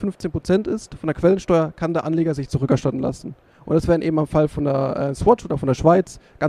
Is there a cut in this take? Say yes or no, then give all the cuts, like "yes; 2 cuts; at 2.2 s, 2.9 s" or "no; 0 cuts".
no; 0 cuts